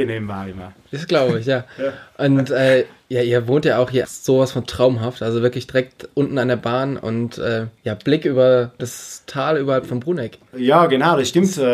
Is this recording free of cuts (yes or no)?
no